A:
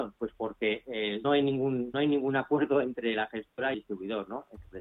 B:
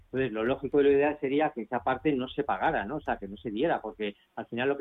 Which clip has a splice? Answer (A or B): A